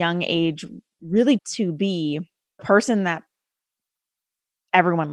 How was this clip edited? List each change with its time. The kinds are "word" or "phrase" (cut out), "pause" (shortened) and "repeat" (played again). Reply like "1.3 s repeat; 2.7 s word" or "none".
1.4 s word; 2.6 s word